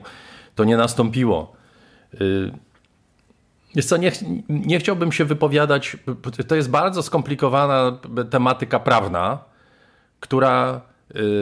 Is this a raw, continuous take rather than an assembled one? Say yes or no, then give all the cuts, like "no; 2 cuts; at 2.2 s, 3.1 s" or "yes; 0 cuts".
yes; 0 cuts